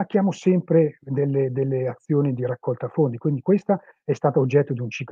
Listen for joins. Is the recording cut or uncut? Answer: uncut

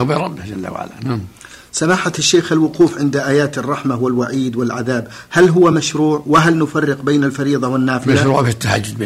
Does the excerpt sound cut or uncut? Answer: uncut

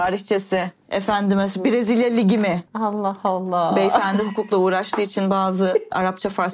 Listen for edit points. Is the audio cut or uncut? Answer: cut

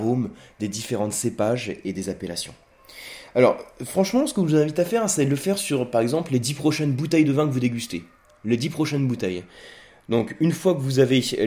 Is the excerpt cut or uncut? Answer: uncut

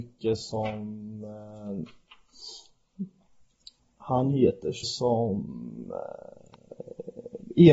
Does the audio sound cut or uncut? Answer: cut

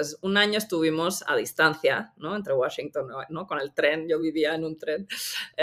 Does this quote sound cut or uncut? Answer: uncut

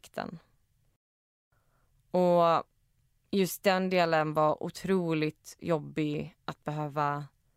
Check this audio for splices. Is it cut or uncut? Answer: uncut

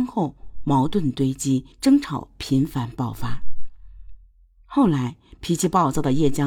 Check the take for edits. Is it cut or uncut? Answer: cut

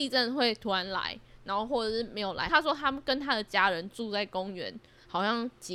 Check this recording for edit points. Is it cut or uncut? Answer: uncut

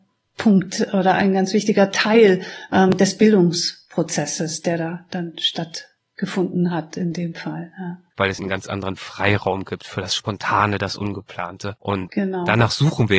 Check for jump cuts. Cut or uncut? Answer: cut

